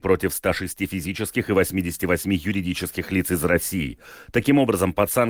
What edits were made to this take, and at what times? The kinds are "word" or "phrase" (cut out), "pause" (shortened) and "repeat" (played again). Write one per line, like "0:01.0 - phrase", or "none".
none